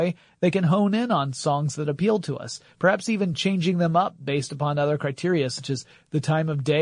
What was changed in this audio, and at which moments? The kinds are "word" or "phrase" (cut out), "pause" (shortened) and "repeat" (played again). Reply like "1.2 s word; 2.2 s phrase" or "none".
none

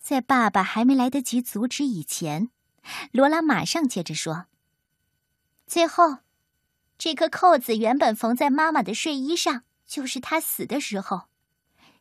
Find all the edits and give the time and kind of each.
9.7 s pause

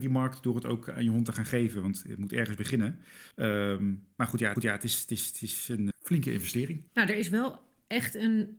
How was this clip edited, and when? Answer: 3.3 s pause; 4.6 s repeat; 5.9 s word; 6.9 s pause

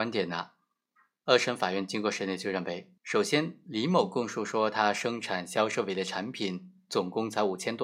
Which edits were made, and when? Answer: 3.0 s pause

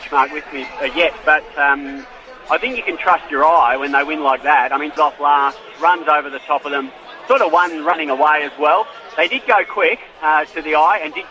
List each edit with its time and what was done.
5.0 s word

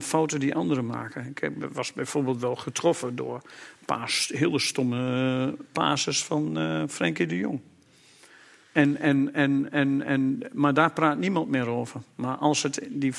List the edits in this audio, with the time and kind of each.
none

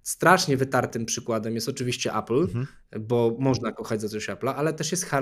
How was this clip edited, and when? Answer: none

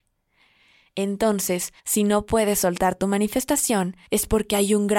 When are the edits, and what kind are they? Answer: 1.8 s pause; 4.1 s pause

